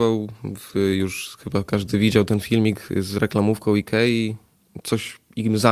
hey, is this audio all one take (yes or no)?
yes